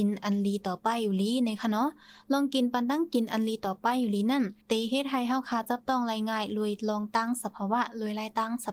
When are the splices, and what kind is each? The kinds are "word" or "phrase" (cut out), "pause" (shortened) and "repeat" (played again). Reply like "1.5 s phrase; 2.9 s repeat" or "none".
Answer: 4.6 s pause